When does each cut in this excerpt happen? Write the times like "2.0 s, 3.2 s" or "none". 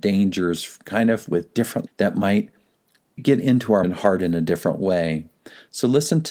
1.9 s, 3.2 s, 3.8 s